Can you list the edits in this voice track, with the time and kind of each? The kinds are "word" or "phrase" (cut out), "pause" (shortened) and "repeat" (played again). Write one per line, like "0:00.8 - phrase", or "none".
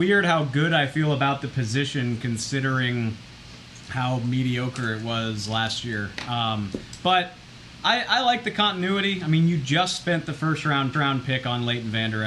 0:10.9 - repeat